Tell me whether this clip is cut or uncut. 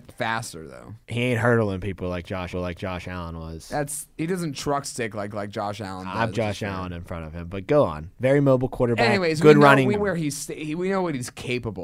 cut